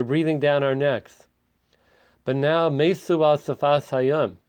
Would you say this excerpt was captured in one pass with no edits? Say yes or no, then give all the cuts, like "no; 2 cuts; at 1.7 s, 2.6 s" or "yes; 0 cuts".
yes; 0 cuts